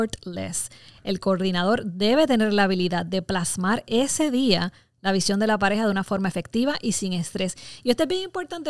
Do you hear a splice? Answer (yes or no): no